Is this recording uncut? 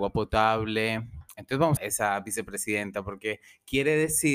no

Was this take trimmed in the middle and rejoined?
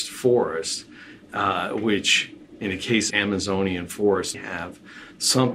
yes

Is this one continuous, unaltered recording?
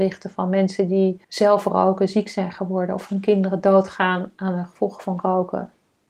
no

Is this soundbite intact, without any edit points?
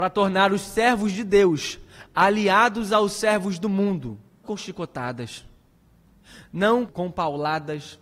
no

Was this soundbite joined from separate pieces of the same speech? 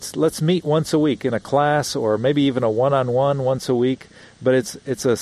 no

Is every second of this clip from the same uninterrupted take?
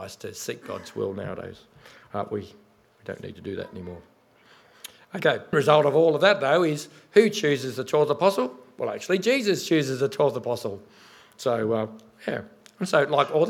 no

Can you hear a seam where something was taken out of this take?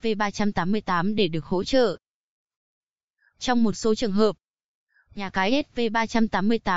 no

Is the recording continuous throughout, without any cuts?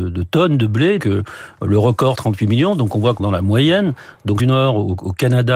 no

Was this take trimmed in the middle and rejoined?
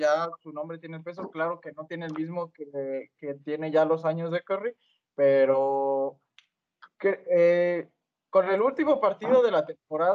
no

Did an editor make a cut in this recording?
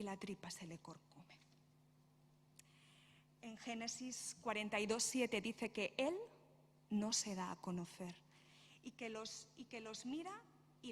no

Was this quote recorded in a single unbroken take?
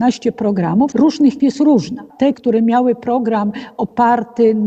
no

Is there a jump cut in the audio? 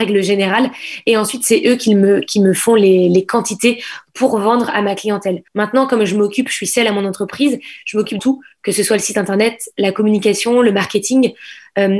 yes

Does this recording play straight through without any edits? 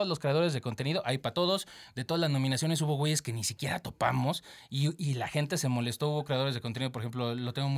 yes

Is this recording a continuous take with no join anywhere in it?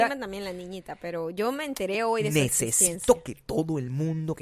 yes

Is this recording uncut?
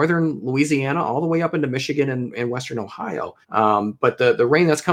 no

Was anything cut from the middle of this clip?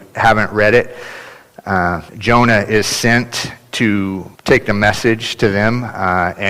yes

